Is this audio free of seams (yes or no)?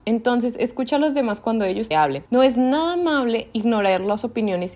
no